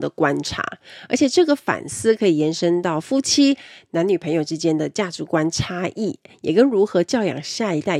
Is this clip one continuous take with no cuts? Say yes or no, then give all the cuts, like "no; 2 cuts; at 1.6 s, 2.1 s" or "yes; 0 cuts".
yes; 0 cuts